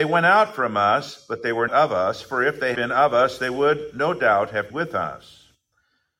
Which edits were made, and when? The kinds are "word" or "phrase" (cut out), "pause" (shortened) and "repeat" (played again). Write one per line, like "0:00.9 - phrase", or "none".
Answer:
0:01.7 - word
0:02.7 - word
0:04.7 - word